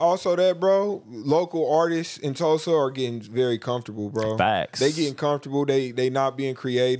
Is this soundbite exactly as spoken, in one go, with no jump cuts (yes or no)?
yes